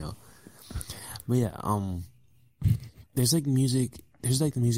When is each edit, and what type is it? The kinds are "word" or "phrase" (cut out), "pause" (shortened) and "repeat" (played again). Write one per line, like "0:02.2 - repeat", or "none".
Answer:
0:03.1 - pause

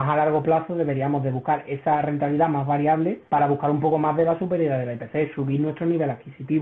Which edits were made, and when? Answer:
0:03.3 - pause

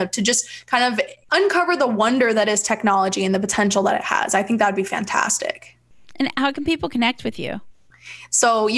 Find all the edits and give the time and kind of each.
none

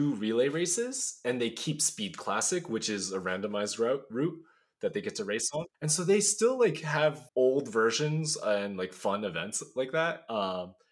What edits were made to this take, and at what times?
0:05.7 - pause
0:07.3 - pause

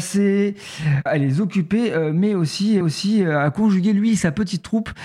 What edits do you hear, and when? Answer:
0:01.1 - word
0:02.8 - repeat

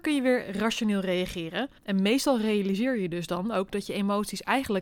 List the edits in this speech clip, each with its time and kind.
0:01.8 - pause

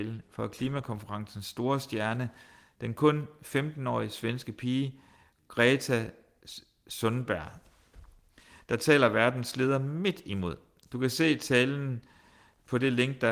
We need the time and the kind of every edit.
none

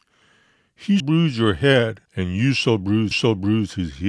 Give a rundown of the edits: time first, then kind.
0:01.0 - word
0:02.1 - pause
0:03.1 - repeat

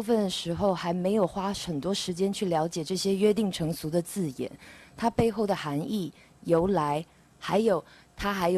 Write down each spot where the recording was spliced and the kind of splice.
none

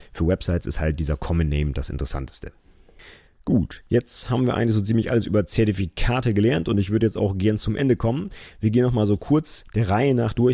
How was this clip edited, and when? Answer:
none

